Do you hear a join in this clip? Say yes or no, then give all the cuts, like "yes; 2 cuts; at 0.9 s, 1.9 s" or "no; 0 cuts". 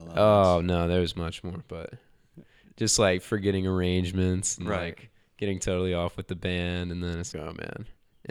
yes; 1 cut; at 7.3 s